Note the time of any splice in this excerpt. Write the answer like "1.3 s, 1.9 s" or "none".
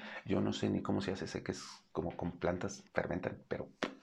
2.9 s